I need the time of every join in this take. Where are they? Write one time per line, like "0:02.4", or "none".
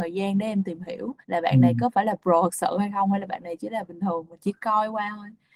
0:01.2